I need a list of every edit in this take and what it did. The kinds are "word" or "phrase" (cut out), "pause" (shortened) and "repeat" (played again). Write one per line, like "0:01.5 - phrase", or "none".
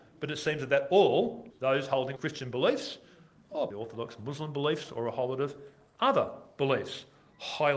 0:01.5 - phrase
0:02.2 - word
0:03.7 - word